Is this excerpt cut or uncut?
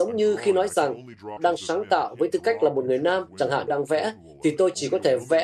cut